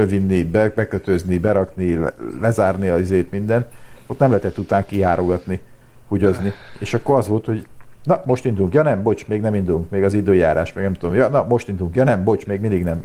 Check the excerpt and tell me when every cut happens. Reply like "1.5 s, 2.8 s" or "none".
none